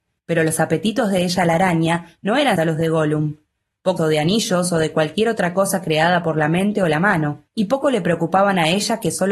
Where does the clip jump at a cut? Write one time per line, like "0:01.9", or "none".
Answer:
0:02.6
0:04.0
0:07.5